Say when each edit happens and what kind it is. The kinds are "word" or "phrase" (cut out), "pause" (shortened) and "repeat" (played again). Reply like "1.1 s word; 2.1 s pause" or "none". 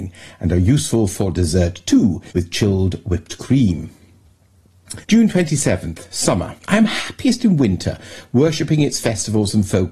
2.3 s pause; 5.0 s pause; 6.6 s pause

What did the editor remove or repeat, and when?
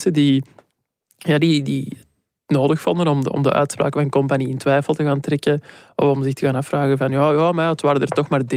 none

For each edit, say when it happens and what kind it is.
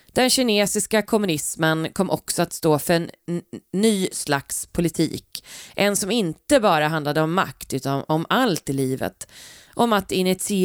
none

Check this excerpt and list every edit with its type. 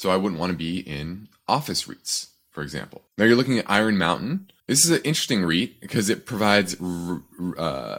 3.1 s pause; 4.6 s pause

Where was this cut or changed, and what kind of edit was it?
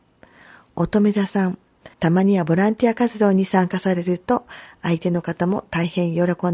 1.9 s pause

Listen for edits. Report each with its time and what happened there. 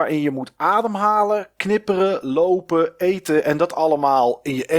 none

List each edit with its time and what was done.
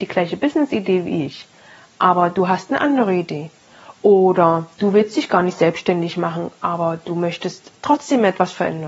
none

